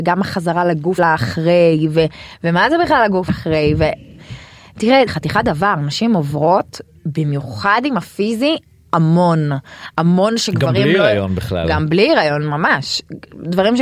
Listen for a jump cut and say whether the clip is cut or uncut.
cut